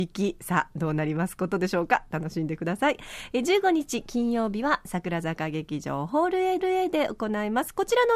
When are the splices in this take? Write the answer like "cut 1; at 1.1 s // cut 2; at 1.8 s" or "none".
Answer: cut 1; at 6.6 s